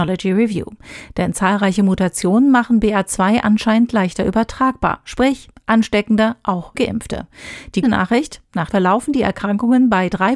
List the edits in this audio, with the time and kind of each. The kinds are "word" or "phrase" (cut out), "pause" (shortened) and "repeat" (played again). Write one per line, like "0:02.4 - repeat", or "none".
0:06.7 - word
0:07.8 - word
0:08.7 - phrase